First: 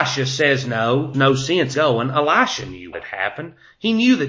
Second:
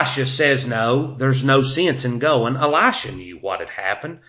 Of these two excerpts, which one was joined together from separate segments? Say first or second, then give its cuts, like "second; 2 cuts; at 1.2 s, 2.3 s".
first; 3 cuts; at 1.1 s, 1.7 s, 2.9 s